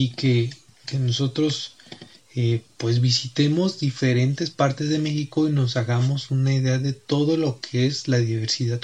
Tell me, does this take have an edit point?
no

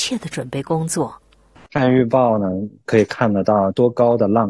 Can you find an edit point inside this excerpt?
no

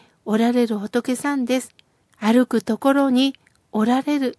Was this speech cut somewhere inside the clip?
yes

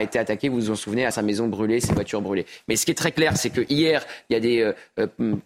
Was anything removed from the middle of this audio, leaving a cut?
yes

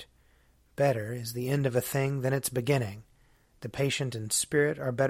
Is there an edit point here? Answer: no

